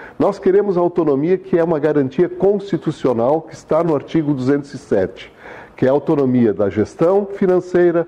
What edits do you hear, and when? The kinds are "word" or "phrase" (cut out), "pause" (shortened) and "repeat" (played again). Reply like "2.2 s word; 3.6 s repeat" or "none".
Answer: none